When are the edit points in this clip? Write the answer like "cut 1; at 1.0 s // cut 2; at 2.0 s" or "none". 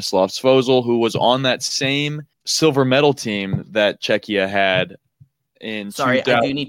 cut 1; at 2.3 s

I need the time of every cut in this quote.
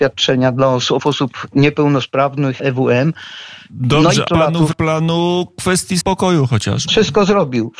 cut 1; at 1.0 s // cut 2; at 2.6 s // cut 3; at 4.3 s // cut 4; at 4.7 s // cut 5; at 6.0 s

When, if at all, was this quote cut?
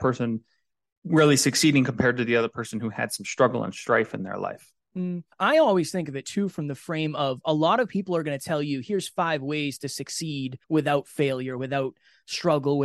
cut 1; at 5.3 s // cut 2; at 10.6 s

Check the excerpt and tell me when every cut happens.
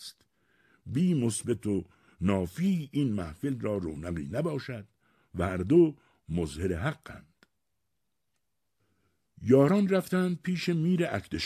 none

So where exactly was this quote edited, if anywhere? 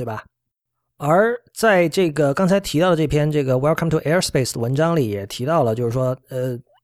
none

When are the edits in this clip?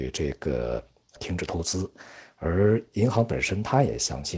cut 1; at 1.2 s

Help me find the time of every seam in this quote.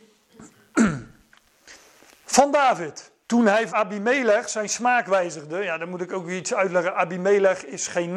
cut 1; at 2.1 s // cut 2; at 3.2 s // cut 3; at 3.7 s

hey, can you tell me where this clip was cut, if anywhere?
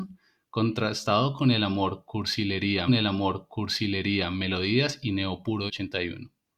cut 1; at 2.9 s // cut 2; at 5.7 s

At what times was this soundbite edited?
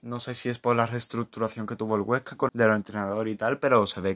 cut 1; at 2.5 s

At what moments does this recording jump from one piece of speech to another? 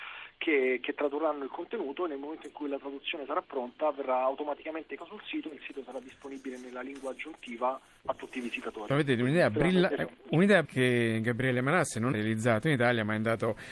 cut 1; at 5.0 s // cut 2; at 8.9 s // cut 3; at 10.7 s // cut 4; at 12.1 s

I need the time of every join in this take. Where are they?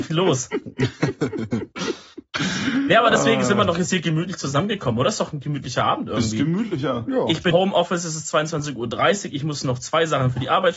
cut 1; at 7.5 s

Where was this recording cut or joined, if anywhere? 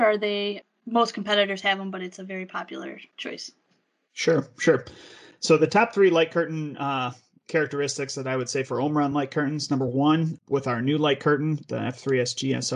none

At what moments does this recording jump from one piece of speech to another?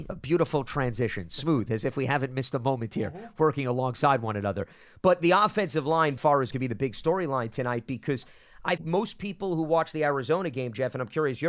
cut 1; at 6.2 s // cut 2; at 6.5 s // cut 3; at 8.8 s

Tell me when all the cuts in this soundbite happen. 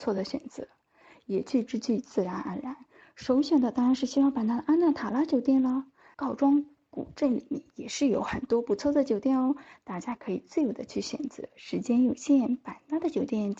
cut 1; at 6.1 s

